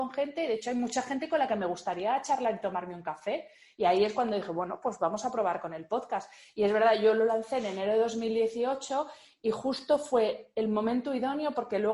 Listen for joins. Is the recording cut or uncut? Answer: uncut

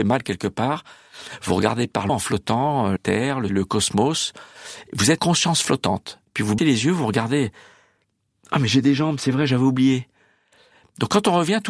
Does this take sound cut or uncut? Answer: cut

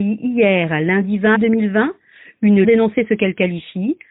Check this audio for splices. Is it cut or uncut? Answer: cut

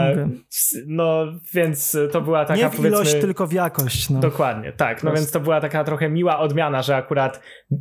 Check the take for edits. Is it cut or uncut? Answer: uncut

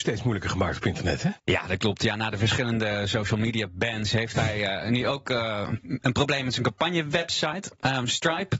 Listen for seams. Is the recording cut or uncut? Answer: cut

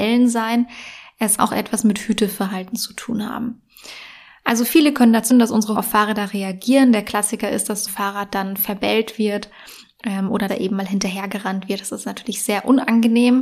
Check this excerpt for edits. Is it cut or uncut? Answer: cut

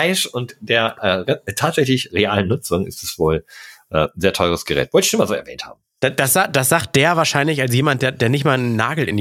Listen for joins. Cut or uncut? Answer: uncut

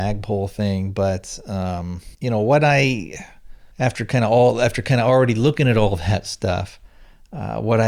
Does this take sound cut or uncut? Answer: cut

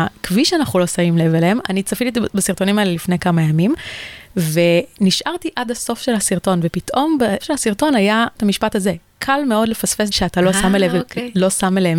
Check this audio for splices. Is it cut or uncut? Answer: cut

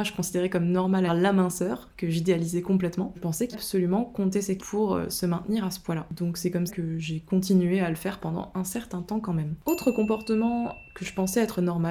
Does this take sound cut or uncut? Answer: cut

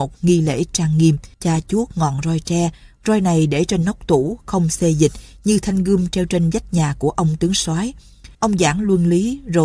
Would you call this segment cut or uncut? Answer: cut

